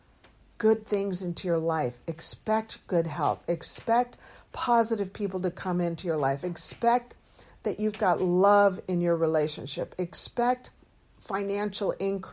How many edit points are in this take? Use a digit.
0